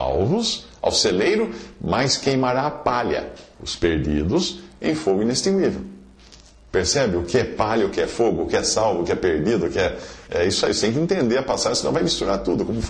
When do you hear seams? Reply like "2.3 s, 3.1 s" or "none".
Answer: none